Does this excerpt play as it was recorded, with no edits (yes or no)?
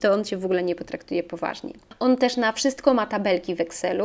yes